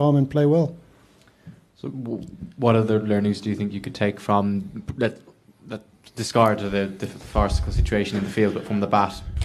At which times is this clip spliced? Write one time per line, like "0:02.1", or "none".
none